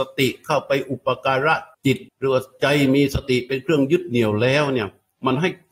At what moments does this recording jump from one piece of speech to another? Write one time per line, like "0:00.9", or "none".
0:01.7
0:02.1